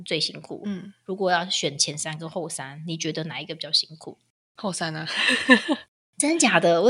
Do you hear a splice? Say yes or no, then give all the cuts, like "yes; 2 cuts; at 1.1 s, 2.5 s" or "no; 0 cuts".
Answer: no; 0 cuts